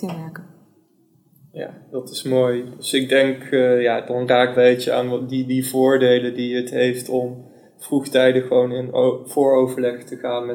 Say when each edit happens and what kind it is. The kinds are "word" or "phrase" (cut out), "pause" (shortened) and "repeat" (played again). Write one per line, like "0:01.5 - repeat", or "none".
0:04.5 - phrase